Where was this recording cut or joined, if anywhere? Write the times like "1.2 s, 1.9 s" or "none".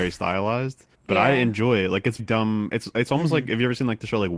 0.9 s, 2.2 s